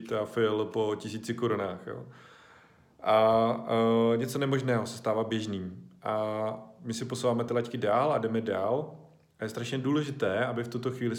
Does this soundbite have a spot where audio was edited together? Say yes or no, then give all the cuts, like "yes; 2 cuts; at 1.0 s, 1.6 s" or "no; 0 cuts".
no; 0 cuts